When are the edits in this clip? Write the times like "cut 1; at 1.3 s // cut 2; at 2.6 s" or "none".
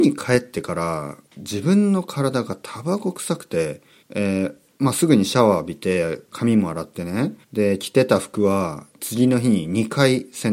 cut 1; at 1.3 s // cut 2; at 4.0 s // cut 3; at 7.4 s